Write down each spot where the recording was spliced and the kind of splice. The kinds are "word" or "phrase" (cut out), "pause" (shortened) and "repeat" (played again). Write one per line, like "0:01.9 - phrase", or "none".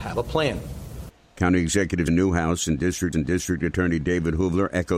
0:02.1 - word
0:03.1 - repeat